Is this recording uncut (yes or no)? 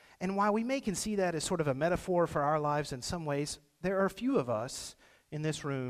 yes